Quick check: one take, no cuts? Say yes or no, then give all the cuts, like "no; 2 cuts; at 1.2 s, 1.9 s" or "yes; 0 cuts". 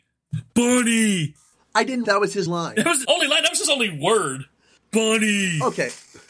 no; 3 cuts; at 2.0 s, 2.5 s, 3.0 s